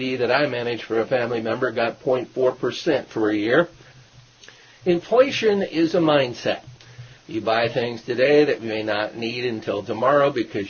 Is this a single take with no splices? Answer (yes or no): yes